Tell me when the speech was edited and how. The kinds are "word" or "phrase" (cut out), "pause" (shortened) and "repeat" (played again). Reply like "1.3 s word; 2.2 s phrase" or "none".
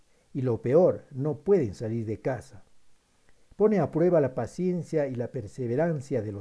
none